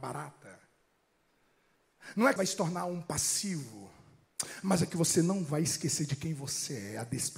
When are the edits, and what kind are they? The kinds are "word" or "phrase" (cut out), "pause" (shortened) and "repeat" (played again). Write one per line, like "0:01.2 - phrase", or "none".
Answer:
0:02.4 - word